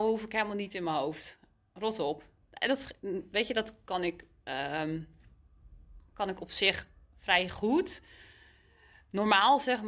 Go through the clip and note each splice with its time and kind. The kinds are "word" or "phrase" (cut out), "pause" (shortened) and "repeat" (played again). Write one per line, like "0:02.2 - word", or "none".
none